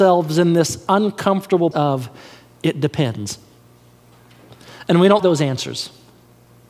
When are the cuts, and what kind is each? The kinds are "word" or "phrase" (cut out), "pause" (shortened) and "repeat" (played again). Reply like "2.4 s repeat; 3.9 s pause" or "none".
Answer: 1.7 s word; 5.2 s word

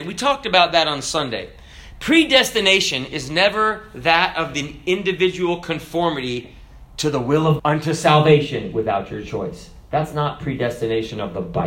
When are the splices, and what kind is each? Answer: 7.6 s word

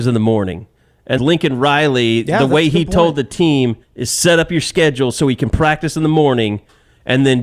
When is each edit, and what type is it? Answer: 1.2 s phrase; 3.8 s pause

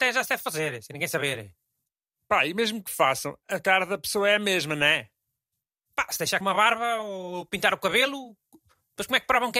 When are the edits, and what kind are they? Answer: 6.4 s word

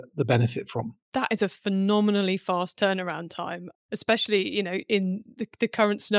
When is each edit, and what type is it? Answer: 1.0 s pause

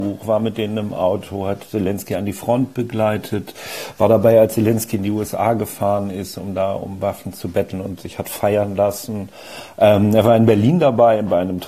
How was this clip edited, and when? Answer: none

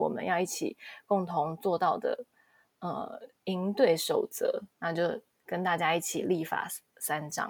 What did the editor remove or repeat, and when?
4.7 s pause

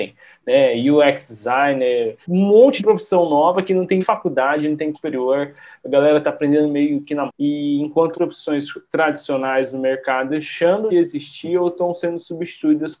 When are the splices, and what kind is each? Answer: 2.2 s word; 2.8 s word; 4.0 s word; 4.9 s word; 7.3 s word; 8.1 s word; 8.9 s word; 10.3 s word; 10.9 s word

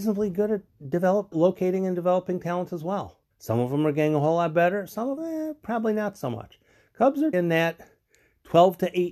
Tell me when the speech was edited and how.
1.3 s word; 3.3 s pause; 5.2 s word; 7.3 s word

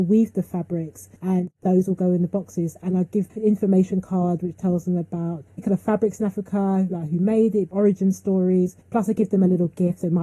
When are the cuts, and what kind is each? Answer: 1.2 s pause; 3.3 s word; 5.5 s pause; 8.8 s pause

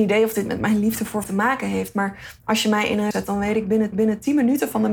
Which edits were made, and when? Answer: 1.2 s word; 3.1 s word; 3.9 s repeat

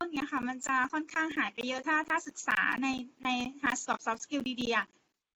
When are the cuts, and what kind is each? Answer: 3.9 s word

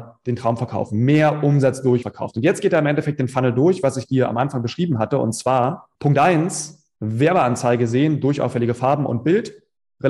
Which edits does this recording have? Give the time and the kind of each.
2.0 s word; 5.9 s pause; 7.0 s pause

